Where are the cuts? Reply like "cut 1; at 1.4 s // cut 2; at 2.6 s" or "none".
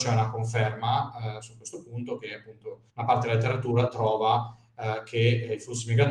cut 1; at 2.9 s